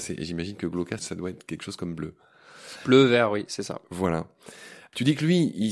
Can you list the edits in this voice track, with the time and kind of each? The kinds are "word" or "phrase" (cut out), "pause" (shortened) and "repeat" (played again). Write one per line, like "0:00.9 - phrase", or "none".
0:01.0 - word